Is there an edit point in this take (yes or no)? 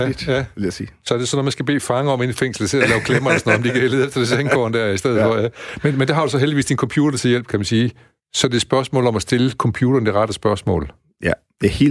no